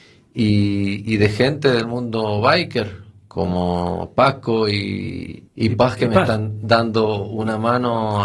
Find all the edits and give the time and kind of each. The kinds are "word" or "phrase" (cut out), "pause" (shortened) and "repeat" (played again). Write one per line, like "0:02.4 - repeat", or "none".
0:05.5 - pause

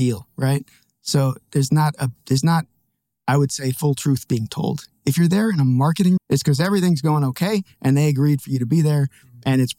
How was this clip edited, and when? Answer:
0:06.2 - word

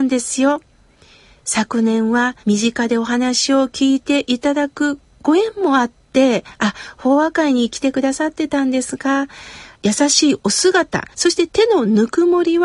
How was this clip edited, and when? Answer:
0:02.4 - pause
0:11.1 - pause

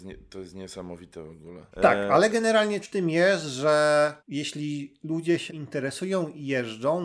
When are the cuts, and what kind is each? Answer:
0:01.7 - pause
0:02.8 - word
0:04.2 - pause
0:05.5 - word

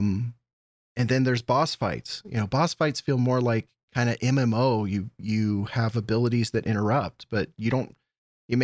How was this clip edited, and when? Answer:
none

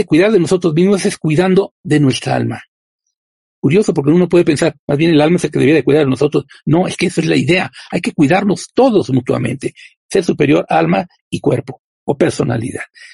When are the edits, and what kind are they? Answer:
none

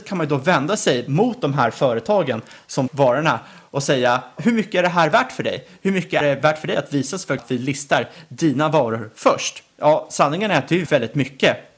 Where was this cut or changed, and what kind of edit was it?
0:02.9 - word
0:04.4 - word
0:06.2 - word
0:07.4 - word
0:09.7 - pause
0:10.9 - word

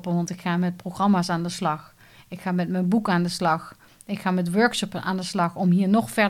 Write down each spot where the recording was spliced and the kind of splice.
none

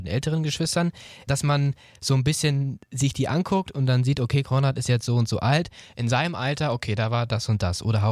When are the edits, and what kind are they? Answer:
0:01.3 - word

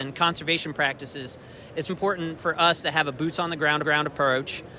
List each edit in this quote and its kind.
0:01.9 - word
0:03.8 - repeat

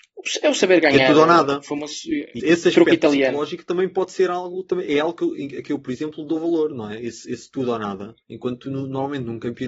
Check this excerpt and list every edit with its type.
0:02.4 - word
0:08.2 - pause

